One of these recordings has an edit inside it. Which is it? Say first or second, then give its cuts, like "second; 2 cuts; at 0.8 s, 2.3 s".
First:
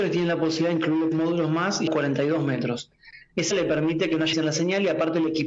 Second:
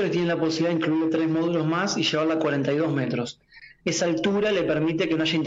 first; 4 cuts; at 1.1 s, 1.9 s, 3.5 s, 4.3 s